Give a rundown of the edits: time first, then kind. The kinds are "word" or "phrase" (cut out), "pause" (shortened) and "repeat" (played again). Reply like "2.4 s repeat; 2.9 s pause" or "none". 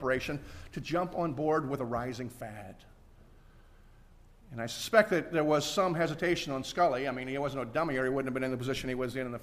none